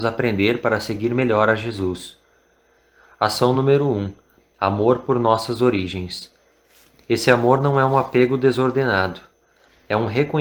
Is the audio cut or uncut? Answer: uncut